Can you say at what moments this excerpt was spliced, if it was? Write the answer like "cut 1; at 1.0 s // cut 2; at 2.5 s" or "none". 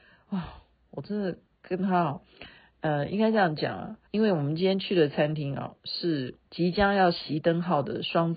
cut 1; at 2.6 s // cut 2; at 4.1 s // cut 3; at 6.4 s